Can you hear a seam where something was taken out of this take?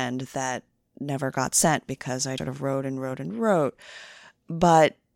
yes; 1 cut; at 2.4 s

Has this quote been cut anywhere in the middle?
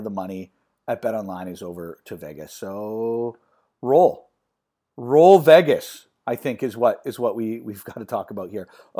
no; 0 cuts

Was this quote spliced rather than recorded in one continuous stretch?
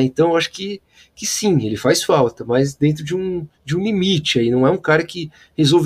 yes; 1 cut; at 3.5 s

